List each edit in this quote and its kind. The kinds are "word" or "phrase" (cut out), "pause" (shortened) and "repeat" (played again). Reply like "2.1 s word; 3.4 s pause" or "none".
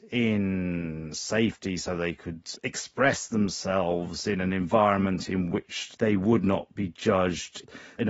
none

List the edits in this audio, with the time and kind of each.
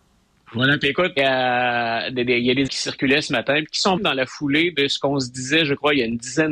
1.2 s word; 2.7 s word; 4.0 s word

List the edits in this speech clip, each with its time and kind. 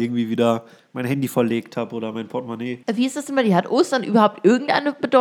2.8 s pause

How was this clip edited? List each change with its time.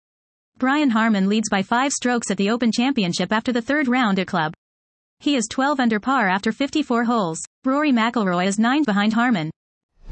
4.3 s phrase; 7.5 s pause; 8.8 s word

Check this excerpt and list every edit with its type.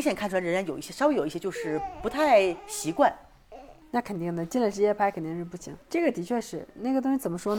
3.8 s pause; 5.8 s pause

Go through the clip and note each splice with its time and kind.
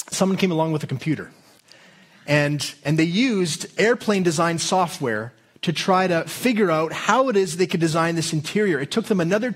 none

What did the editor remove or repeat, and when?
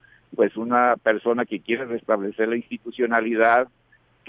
none

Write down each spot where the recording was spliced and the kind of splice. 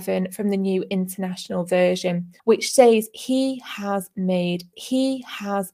2.4 s pause; 4.7 s repeat

